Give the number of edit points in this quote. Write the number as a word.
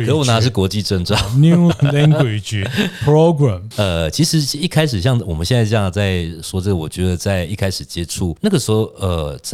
two